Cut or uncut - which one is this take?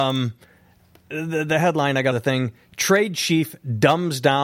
cut